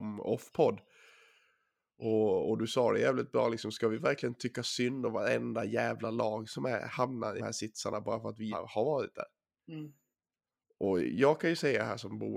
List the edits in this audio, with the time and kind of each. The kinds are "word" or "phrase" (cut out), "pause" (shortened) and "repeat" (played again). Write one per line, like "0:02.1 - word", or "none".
0:07.4 - word
0:08.5 - word
0:10.1 - pause